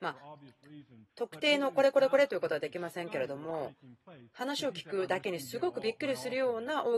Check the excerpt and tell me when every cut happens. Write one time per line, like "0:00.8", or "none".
0:01.1